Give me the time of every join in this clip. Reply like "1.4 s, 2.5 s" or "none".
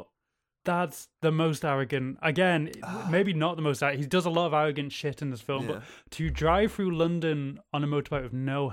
none